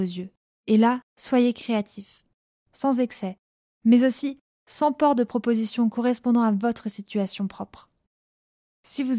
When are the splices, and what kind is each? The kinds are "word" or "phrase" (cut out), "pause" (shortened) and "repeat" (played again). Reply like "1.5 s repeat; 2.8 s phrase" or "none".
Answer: none